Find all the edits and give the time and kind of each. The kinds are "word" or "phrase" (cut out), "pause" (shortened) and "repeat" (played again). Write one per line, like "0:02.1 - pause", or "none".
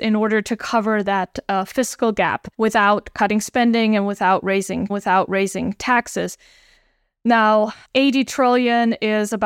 0:02.5 - pause
0:04.9 - repeat